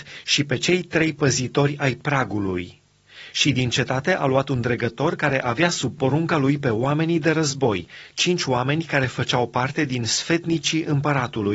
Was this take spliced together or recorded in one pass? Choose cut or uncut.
uncut